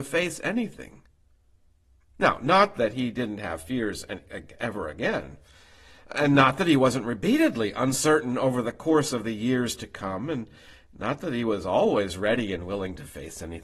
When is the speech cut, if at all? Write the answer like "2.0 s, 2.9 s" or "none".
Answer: none